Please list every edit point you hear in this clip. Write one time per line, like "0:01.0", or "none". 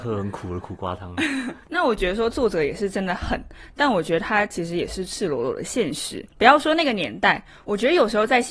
0:01.6
0:06.3